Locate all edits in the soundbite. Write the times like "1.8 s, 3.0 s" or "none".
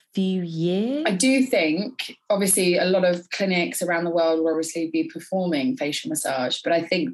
none